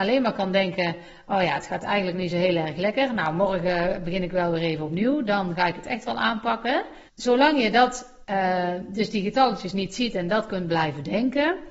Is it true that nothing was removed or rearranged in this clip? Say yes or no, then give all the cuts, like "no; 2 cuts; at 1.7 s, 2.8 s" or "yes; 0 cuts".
no; 2 cuts; at 7.1 s, 8.2 s